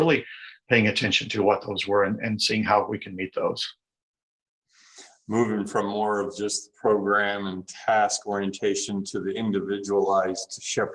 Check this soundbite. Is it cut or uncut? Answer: uncut